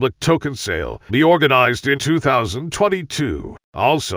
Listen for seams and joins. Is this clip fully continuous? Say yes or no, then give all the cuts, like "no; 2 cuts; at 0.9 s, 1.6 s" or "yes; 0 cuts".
no; 2 cuts; at 1.1 s, 2.0 s